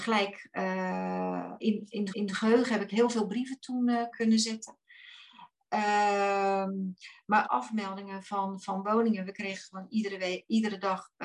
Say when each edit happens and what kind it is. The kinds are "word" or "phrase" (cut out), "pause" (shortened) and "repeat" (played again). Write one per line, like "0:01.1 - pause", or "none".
0:01.6 - word
0:02.1 - repeat
0:04.1 - word
0:07.4 - phrase

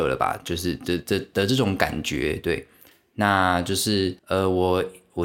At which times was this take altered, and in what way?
0:04.2 - pause

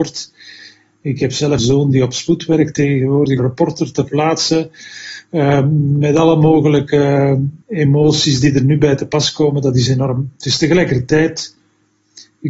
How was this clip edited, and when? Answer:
0:01.6 - word
0:03.4 - phrase
0:07.6 - pause

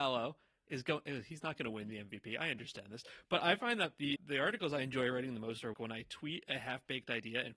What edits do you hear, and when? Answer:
0:04.2 - word
0:05.7 - word

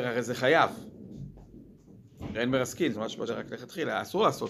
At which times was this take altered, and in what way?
0:02.3 - word
0:02.9 - word
0:03.3 - word

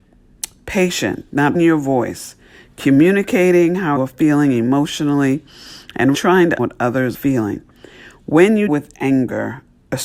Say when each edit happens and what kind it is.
0:01.5 - word
0:04.0 - word
0:06.1 - word
0:06.6 - word
0:07.1 - word
0:08.7 - word

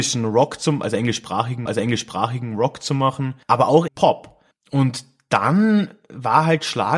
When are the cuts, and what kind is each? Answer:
0:01.7 - repeat
0:03.4 - pause
0:03.9 - word
0:04.5 - pause

